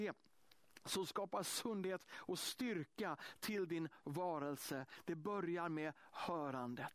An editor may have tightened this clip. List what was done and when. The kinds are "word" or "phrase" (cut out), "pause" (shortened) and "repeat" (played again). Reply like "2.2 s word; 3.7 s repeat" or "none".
none